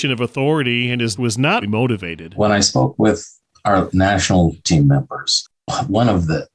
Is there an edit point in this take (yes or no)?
yes